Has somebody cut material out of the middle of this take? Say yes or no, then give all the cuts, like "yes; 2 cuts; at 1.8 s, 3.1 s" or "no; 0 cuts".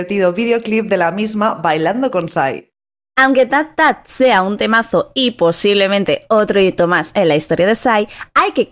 no; 0 cuts